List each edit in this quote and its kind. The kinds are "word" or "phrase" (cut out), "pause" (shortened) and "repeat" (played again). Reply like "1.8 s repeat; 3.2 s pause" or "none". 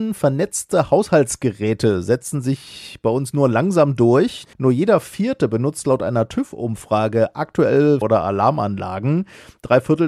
4.5 s pause; 8.0 s phrase